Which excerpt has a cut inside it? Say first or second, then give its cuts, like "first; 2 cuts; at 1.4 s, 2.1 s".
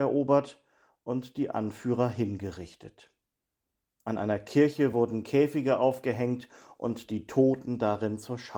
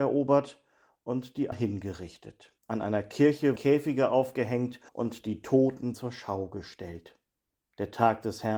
second; 6 cuts; at 1.5 s, 2.6 s, 3.6 s, 4.9 s, 5.9 s, 7.5 s